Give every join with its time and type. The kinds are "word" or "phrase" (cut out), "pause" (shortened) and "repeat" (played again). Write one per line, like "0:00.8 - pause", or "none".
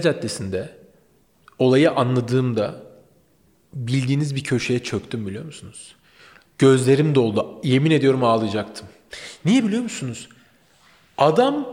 none